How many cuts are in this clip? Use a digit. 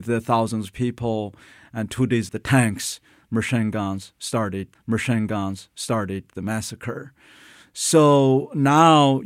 2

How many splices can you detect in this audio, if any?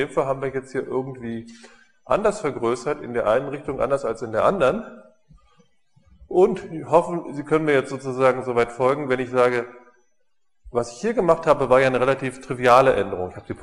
0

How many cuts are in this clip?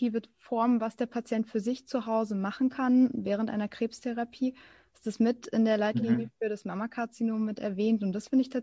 0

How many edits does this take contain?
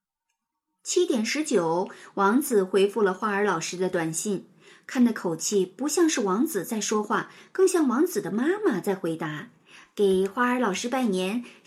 0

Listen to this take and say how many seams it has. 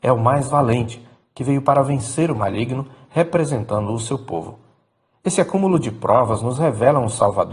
0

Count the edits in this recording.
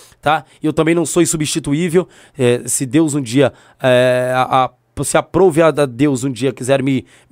0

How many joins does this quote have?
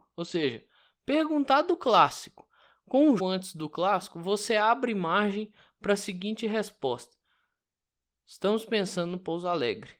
1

